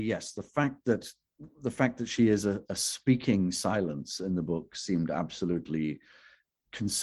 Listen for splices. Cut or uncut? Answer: cut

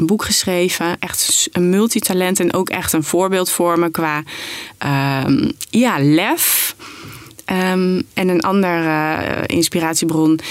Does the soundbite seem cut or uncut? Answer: cut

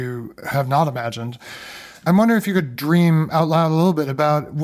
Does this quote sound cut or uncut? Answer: uncut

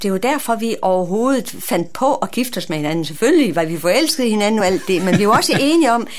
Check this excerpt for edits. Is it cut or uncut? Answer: uncut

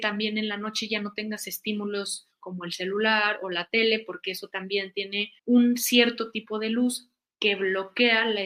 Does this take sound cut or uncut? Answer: cut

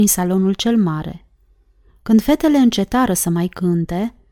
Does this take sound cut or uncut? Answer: uncut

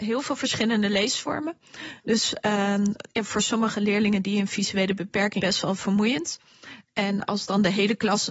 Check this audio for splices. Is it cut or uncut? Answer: cut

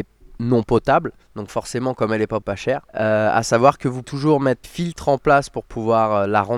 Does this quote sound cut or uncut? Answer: cut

